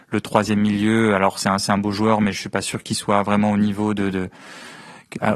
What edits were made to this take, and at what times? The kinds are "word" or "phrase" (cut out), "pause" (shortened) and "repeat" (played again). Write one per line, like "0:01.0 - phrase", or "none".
none